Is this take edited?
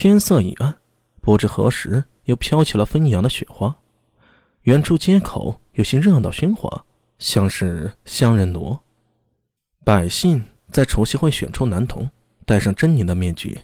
no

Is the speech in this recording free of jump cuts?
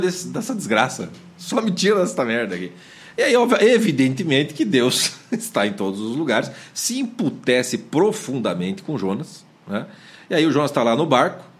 yes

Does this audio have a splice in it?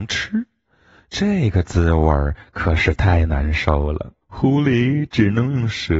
yes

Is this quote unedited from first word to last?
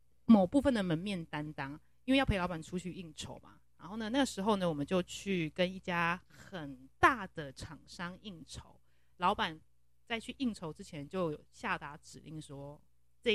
yes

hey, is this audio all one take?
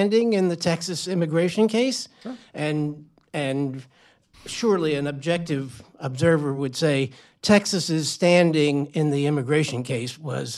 yes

